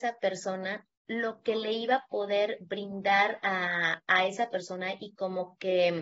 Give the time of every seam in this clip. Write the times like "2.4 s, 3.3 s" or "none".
0.9 s